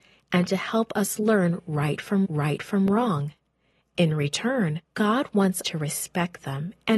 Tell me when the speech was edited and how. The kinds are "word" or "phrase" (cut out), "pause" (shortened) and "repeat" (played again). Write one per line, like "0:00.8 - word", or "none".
0:02.2 - repeat
0:04.8 - pause
0:05.6 - word